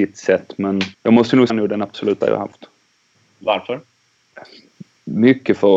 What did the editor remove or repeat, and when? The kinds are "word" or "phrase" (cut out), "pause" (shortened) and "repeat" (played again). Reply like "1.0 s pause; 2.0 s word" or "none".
0.9 s pause; 1.5 s phrase; 2.2 s word; 3.1 s pause